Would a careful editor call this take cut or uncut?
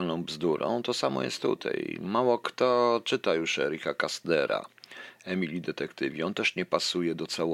uncut